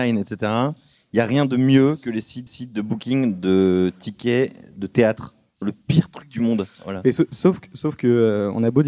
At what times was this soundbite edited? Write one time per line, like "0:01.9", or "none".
0:02.5
0:05.6